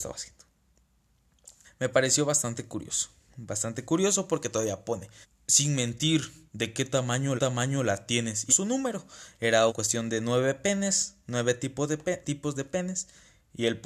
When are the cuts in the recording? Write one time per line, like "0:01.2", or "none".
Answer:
0:01.6
0:05.2
0:06.5
0:07.4
0:08.5
0:09.7
0:12.2